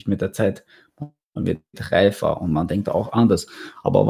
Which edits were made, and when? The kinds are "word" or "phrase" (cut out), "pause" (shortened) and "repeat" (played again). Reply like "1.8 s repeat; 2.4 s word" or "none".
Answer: none

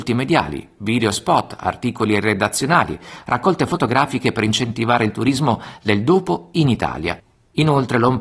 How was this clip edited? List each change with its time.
none

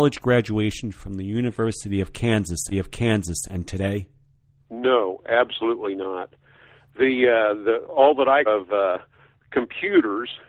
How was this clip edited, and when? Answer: 2.7 s repeat; 8.5 s phrase

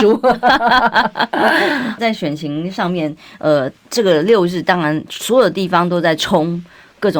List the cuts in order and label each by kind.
2.0 s phrase; 3.8 s pause

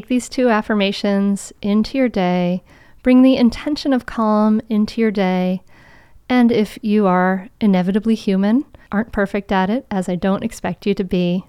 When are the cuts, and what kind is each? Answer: 8.9 s word

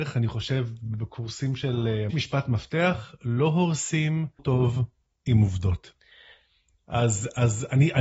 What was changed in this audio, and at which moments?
2.1 s phrase; 4.4 s word

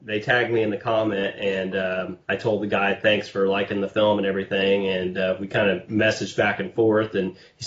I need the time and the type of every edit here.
2.2 s pause

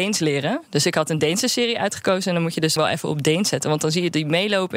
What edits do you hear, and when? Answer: 2.8 s word

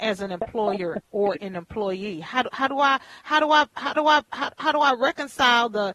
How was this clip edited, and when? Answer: 4.0 s repeat

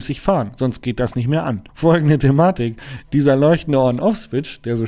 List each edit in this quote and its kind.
1.7 s pause

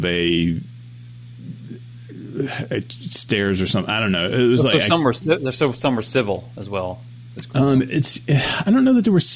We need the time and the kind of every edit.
none

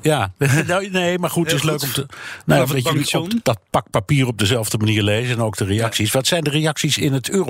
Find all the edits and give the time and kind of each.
3.0 s word; 3.4 s word

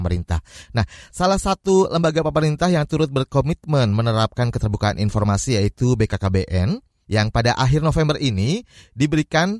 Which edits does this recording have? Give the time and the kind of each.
none

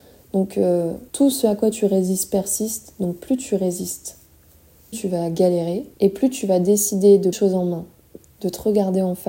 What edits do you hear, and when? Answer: 1.1 s pause; 4.9 s word; 5.9 s pause; 7.3 s phrase

